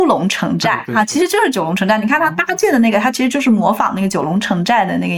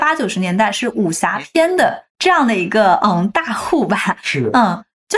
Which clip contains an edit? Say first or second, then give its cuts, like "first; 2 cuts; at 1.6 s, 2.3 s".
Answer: second; 1 cut; at 2.1 s